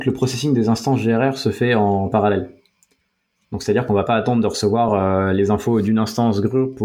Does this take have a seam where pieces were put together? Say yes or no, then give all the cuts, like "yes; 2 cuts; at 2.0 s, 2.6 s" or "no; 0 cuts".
no; 0 cuts